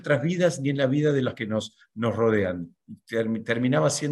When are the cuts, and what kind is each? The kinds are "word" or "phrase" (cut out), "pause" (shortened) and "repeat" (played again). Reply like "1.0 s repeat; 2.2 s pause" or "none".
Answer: 1.3 s word